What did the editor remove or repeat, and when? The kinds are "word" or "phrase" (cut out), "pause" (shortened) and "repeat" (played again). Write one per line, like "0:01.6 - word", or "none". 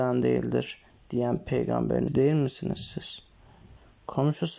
0:02.1 - word